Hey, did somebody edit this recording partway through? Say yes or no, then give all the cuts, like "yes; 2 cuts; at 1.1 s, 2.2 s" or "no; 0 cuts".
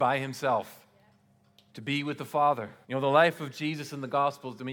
yes; 2 cuts; at 1.7 s, 2.8 s